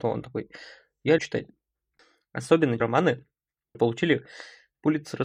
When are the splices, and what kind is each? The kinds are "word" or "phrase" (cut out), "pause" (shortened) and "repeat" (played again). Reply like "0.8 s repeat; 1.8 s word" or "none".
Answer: 1.2 s word; 2.8 s word; 3.7 s word